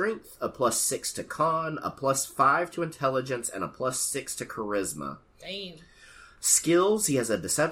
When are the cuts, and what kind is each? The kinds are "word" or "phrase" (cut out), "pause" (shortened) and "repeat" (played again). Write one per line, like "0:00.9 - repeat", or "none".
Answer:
none